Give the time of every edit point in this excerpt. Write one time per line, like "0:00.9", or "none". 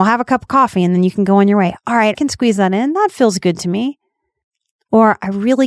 0:02.1